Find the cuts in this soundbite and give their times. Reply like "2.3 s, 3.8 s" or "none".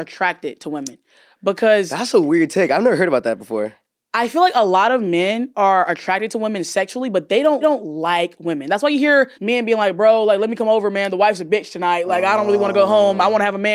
7.6 s, 9.3 s